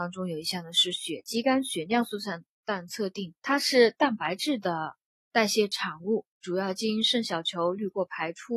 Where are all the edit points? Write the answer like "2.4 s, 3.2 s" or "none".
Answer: 3.4 s